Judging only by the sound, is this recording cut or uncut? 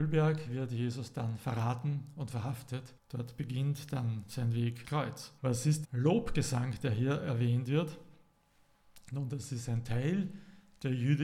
cut